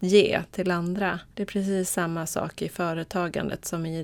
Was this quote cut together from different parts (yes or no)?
yes